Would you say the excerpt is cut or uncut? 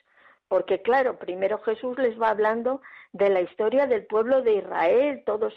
uncut